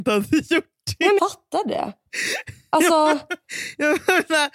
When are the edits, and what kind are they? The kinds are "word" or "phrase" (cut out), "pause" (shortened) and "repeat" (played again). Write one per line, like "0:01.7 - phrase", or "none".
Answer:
0:01.2 - word